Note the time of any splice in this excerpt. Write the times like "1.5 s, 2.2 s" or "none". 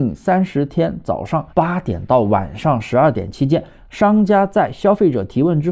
1.5 s